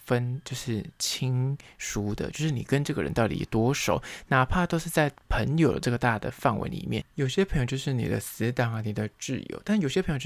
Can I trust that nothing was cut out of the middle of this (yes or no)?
no